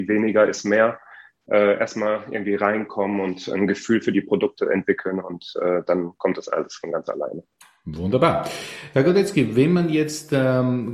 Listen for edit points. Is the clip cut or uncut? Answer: uncut